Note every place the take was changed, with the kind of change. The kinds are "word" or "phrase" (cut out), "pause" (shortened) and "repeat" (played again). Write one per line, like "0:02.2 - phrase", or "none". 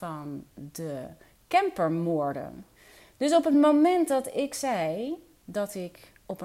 none